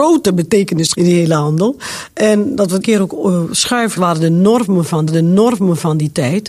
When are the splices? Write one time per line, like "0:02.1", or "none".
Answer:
0:00.9
0:02.8
0:04.0
0:05.1